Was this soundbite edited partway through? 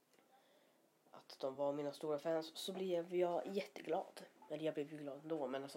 no; 0 cuts

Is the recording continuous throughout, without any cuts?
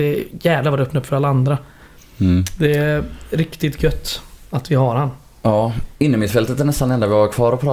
yes; 0 cuts

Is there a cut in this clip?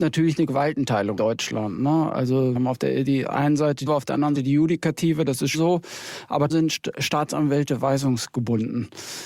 yes; 6 cuts; at 1.2 s, 2.5 s, 3.9 s, 4.3 s, 5.5 s, 6.5 s

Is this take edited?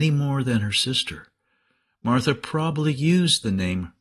no; 0 cuts

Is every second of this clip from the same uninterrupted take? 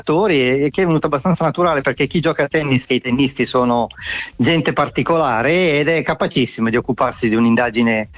no; 1 cut; at 2.8 s

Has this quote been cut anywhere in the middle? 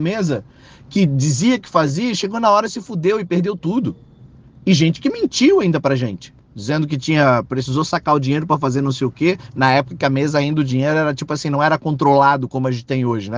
no; 0 cuts

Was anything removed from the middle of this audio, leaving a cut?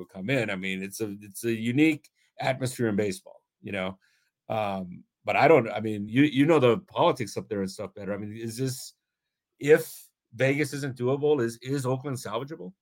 no; 0 cuts

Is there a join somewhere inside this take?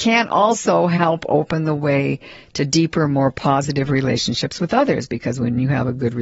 no; 0 cuts

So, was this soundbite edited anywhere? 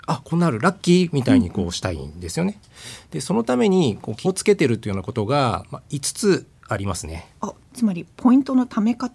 yes; 1 cut; at 4.1 s

